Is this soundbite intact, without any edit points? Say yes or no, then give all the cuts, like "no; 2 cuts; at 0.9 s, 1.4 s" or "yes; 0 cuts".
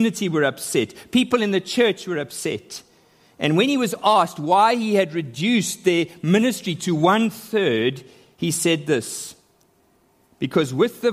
yes; 0 cuts